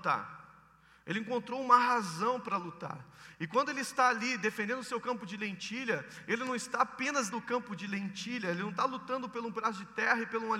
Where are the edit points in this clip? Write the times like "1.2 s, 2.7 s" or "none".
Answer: 7.3 s

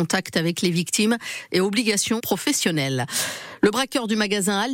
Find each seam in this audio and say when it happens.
2.2 s

